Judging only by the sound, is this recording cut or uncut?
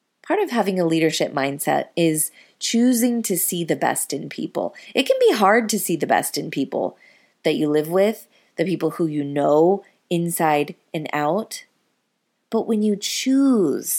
uncut